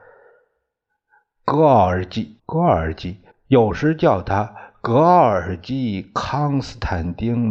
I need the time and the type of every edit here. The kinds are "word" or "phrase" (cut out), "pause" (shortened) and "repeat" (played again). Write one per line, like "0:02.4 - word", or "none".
0:02.4 - pause
0:03.3 - pause